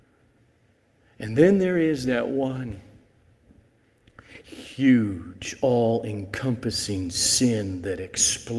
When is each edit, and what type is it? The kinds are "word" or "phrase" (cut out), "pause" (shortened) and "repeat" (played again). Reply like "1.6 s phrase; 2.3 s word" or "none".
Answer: none

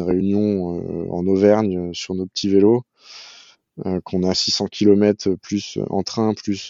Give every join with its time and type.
4.3 s word

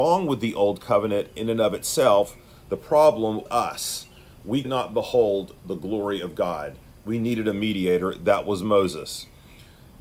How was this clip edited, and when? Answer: 3.5 s word; 4.6 s word

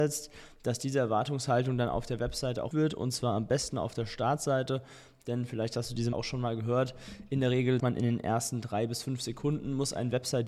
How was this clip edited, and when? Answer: 2.7 s word; 6.1 s word; 7.8 s word

